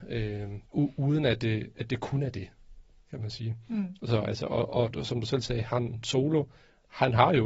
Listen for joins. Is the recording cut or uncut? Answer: uncut